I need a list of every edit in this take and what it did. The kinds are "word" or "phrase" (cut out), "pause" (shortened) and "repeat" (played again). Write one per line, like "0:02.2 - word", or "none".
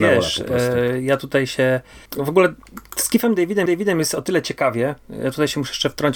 0:02.1 - pause
0:03.7 - repeat